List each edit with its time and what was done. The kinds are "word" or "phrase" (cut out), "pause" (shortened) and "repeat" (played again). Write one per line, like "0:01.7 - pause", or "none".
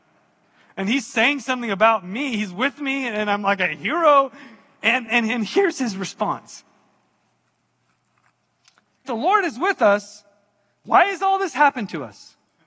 0:05.1 - word
0:09.0 - word